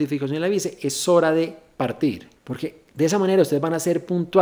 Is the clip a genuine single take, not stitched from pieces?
no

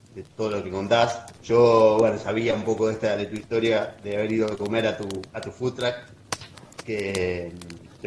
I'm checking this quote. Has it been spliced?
yes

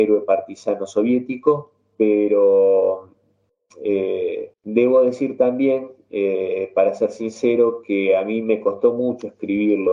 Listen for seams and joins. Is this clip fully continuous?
no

